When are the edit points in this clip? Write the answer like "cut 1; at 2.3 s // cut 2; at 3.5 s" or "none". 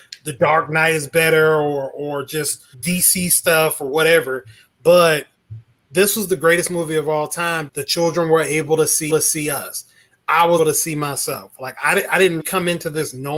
cut 1; at 2.7 s // cut 2; at 7.7 s // cut 3; at 9.1 s // cut 4; at 10.6 s // cut 5; at 12.4 s